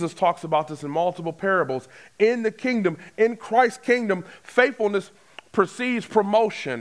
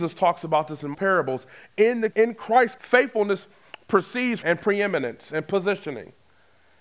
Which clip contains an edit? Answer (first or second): second